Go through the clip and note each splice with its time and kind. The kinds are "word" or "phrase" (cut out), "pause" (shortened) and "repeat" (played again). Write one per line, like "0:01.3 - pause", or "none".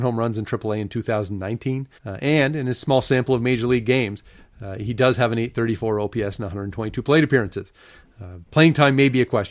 0:02.0 - pause
0:08.5 - pause